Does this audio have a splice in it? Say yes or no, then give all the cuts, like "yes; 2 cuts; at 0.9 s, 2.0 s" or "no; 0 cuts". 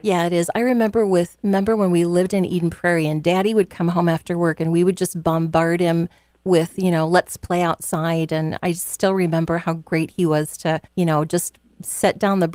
yes; 1 cut; at 10.9 s